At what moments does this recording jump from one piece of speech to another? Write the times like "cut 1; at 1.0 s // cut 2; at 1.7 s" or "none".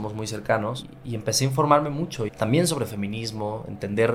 cut 1; at 2.3 s